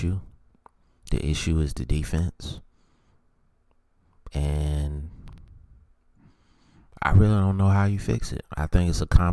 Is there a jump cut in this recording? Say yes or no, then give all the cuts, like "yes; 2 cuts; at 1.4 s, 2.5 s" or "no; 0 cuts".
no; 0 cuts